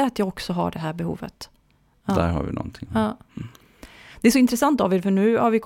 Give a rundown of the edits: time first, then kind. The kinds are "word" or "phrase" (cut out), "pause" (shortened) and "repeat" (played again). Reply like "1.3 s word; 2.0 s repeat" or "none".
none